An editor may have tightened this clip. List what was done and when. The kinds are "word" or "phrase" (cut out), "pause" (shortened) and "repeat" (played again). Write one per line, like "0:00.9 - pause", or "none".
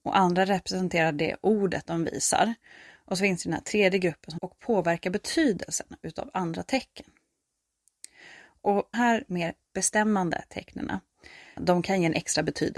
0:04.4 - phrase
0:08.9 - word